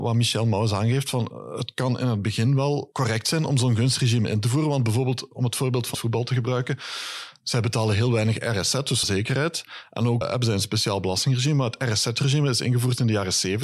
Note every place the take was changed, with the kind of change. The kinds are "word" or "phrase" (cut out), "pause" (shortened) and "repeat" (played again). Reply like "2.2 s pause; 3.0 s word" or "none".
2.9 s word; 5.9 s word; 9.0 s word; 10.2 s word